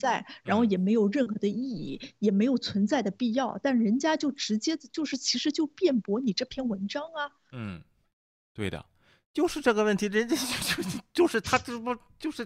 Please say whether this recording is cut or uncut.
uncut